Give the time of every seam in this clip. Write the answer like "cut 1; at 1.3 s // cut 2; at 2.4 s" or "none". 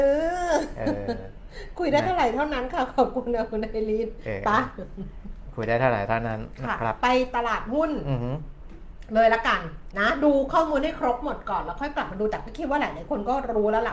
cut 1; at 9.9 s